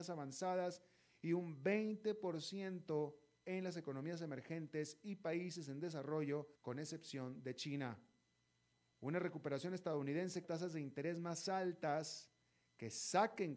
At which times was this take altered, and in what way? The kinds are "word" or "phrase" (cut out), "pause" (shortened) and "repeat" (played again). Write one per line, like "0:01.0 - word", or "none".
0:06.6 - pause
0:08.7 - pause
0:10.4 - word